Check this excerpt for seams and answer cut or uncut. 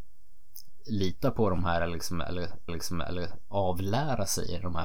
cut